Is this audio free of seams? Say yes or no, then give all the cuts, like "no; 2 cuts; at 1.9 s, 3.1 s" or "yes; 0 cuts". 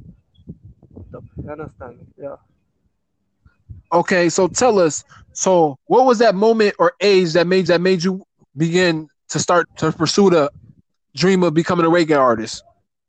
no; 5 cuts; at 1.1 s, 2.1 s, 5.8 s, 7.7 s, 9.6 s